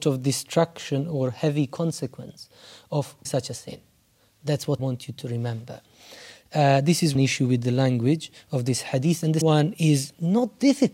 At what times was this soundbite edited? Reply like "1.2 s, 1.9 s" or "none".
3.2 s, 4.8 s, 7.1 s, 9.4 s